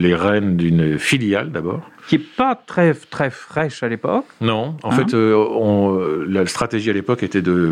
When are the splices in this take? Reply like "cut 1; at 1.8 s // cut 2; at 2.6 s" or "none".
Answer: none